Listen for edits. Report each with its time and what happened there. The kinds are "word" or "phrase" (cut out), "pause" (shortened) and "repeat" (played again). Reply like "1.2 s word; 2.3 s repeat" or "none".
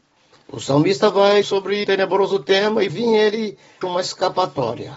1.4 s word; 1.8 s word; 2.9 s word; 3.8 s word